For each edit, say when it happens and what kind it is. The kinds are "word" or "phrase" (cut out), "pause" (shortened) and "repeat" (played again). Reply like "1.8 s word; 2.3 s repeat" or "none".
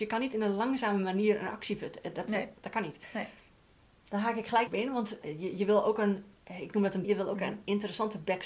4.7 s word; 5.2 s word; 7.0 s word